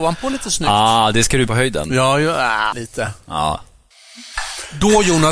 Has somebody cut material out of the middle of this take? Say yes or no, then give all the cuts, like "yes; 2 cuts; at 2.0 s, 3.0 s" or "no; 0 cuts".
yes; 2 cuts; at 1.5 s, 2.7 s